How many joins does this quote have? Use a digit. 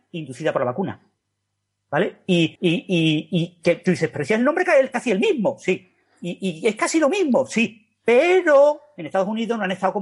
1